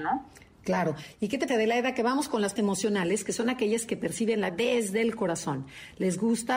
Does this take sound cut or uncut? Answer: cut